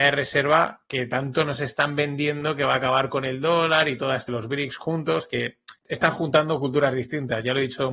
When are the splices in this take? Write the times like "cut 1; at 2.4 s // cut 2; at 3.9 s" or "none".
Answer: cut 1; at 4.3 s // cut 2; at 5.8 s